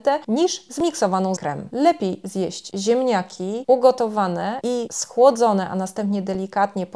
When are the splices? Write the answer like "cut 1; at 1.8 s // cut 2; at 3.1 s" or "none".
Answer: cut 1; at 1.4 s